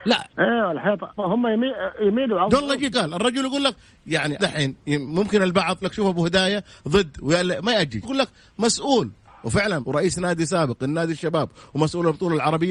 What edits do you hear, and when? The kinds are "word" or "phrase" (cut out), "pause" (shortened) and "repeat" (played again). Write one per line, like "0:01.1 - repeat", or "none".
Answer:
0:01.2 - word
0:02.9 - word
0:04.4 - word
0:05.8 - word
0:08.0 - word
0:09.8 - word